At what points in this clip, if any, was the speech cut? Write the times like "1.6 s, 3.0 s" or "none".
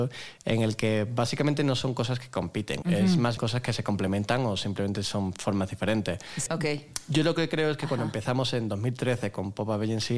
2.8 s, 3.4 s, 6.5 s